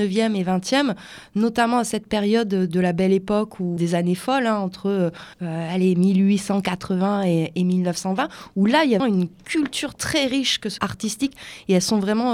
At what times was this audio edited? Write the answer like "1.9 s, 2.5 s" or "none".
3.8 s, 5.3 s, 9.0 s, 10.8 s